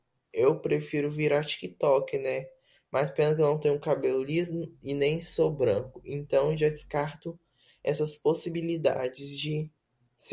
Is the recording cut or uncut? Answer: uncut